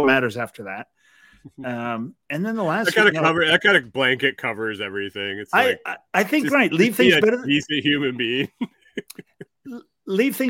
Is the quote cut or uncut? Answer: cut